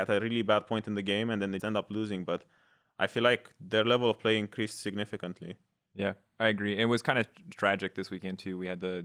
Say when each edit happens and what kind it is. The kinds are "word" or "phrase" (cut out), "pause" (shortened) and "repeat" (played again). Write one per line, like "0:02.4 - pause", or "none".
0:01.6 - word

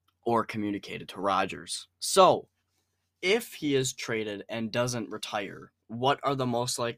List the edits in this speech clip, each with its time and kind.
0:01.9 - pause
0:05.8 - pause

